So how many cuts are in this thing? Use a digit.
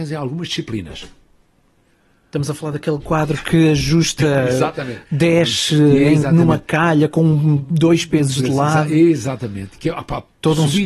0